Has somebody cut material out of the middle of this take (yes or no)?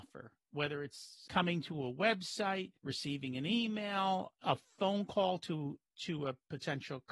yes